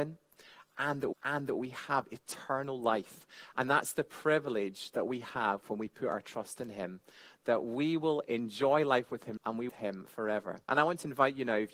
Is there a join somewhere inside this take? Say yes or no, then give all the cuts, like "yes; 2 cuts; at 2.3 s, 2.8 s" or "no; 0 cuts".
yes; 4 cuts; at 1.1 s, 9.4 s, 9.7 s, 10.6 s